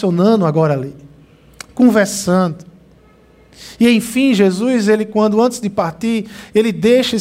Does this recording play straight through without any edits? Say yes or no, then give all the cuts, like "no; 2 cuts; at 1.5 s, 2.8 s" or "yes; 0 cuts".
yes; 0 cuts